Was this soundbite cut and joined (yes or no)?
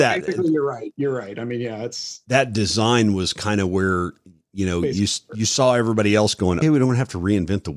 yes